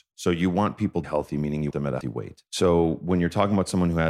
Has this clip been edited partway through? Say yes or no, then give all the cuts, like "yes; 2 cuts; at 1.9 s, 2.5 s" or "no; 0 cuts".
yes; 4 cuts; at 1.0 s, 1.7 s, 2.0 s, 2.5 s